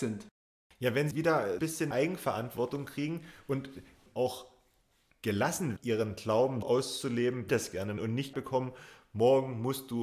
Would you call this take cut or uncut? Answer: cut